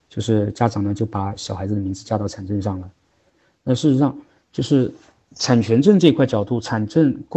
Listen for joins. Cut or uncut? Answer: uncut